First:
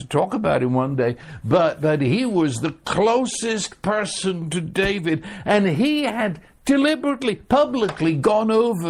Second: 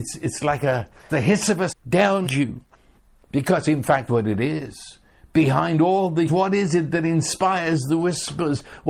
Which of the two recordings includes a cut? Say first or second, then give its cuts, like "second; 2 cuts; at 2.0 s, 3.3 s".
second; 6 cuts; at 1.1 s, 1.7 s, 2.2 s, 3.0 s, 4.1 s, 6.3 s